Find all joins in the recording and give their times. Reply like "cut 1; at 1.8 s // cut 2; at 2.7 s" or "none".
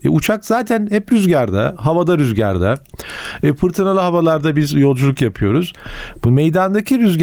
none